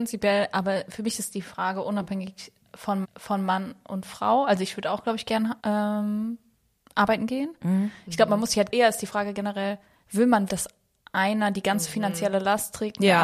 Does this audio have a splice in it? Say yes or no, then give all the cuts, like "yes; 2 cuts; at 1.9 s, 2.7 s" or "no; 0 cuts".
yes; 4 cuts; at 3.0 s, 5.6 s, 8.7 s, 10.5 s